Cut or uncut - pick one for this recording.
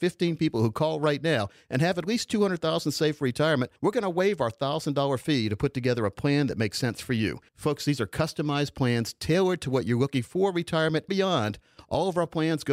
cut